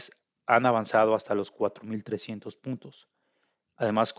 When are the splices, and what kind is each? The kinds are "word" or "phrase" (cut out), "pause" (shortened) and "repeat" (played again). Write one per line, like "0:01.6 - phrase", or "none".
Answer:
none